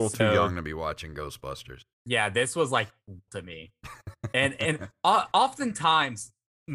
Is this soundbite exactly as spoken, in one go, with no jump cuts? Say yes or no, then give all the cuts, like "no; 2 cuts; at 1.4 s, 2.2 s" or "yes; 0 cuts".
no; 2 cuts; at 1.9 s, 3.3 s